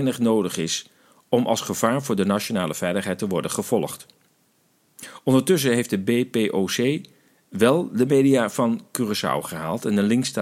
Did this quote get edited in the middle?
no; 0 cuts

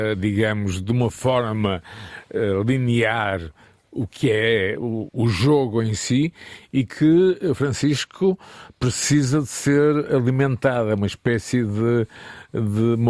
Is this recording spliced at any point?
no; 0 cuts

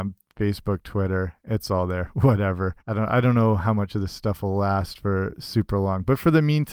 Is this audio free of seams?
no; 1 cut; at 2.8 s

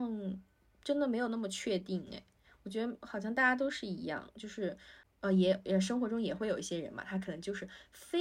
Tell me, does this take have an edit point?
no; 0 cuts

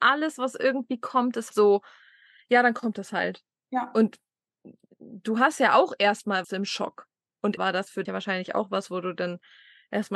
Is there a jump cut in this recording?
yes; 4 cuts; at 1.5 s, 6.4 s, 7.6 s, 8.1 s

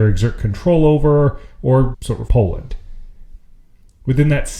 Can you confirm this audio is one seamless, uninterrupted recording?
no; 2 cuts; at 1.9 s, 2.3 s

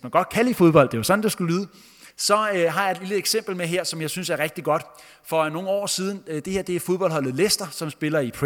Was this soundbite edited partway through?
yes; 1 cut; at 2.1 s

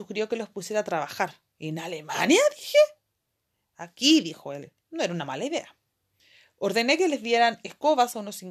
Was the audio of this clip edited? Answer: yes; 2 cuts; at 1.5 s, 4.8 s

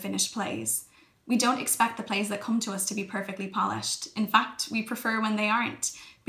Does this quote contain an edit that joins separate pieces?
no; 0 cuts

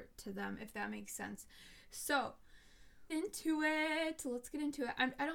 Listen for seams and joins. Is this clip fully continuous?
no; 1 cut; at 3.1 s

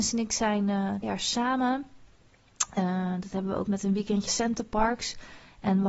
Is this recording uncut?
no; 3 cuts; at 1.0 s, 3.7 s, 4.3 s

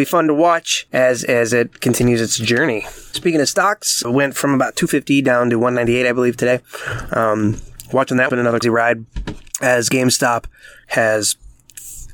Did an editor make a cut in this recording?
yes; 3 cuts; at 4.0 s, 8.3 s, 8.6 s

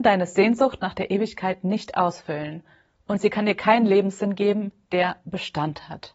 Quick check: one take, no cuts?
yes; 0 cuts

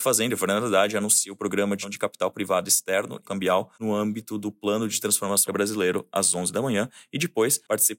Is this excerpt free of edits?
no; 4 cuts; at 1.8 s, 3.2 s, 3.7 s, 5.5 s

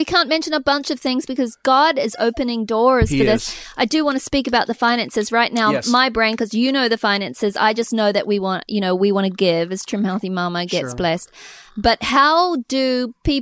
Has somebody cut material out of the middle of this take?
no; 0 cuts

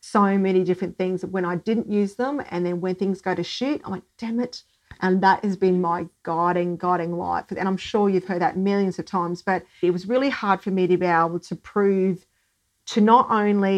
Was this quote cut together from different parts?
no; 0 cuts

